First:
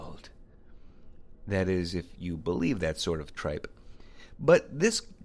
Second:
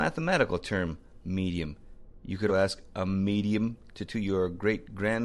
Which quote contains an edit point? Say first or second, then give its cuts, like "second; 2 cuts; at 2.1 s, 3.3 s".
second; 2 cuts; at 2.5 s, 4.1 s